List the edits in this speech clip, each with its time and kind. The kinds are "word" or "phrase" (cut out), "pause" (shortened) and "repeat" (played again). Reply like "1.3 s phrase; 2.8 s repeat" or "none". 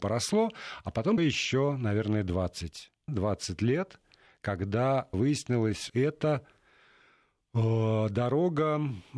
1.2 s word; 3.1 s word; 5.1 s word; 5.9 s word